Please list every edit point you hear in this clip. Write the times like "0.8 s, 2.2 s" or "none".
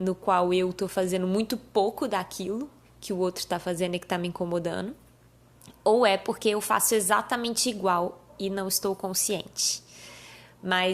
2.9 s